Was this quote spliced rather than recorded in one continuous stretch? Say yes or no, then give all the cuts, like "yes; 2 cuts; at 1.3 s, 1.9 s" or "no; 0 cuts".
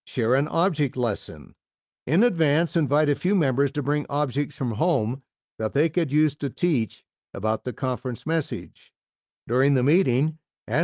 no; 0 cuts